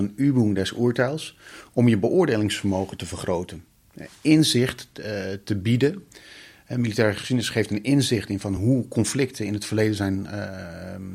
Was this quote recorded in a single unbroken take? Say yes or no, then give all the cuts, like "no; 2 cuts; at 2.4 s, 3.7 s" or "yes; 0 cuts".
yes; 0 cuts